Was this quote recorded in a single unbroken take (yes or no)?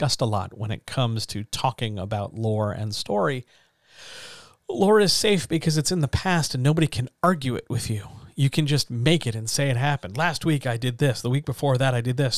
yes